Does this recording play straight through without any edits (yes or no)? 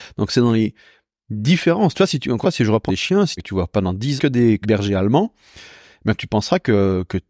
no